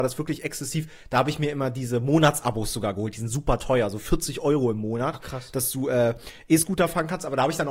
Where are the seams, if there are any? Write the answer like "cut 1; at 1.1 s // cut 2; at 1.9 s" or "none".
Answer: none